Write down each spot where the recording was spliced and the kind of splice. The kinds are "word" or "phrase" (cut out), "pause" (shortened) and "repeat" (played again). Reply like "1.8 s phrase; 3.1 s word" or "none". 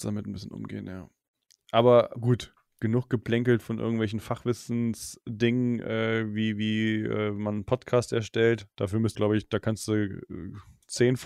9.1 s word